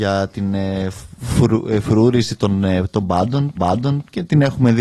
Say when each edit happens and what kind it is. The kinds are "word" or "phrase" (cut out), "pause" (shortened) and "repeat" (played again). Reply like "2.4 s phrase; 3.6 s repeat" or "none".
3.6 s repeat